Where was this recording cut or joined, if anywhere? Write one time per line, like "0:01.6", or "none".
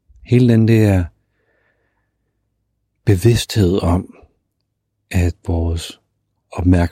none